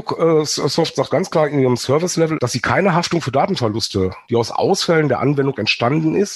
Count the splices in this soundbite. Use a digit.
2